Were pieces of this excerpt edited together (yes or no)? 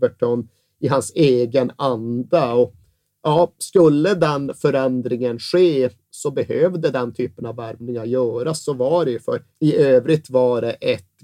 no